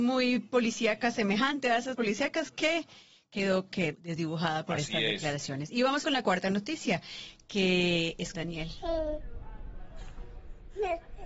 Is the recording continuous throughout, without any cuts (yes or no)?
no